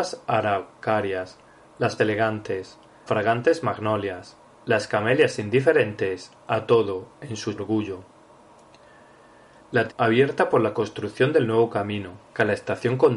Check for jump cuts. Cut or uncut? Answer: cut